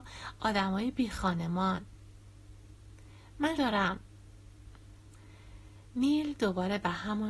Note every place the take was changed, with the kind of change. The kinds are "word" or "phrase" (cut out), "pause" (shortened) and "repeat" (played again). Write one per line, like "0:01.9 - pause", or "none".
0:03.6 - phrase